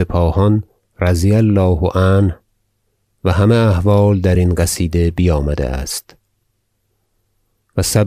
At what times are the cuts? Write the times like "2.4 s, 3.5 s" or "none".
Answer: none